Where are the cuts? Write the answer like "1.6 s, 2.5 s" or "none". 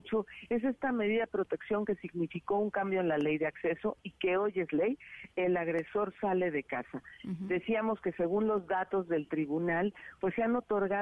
none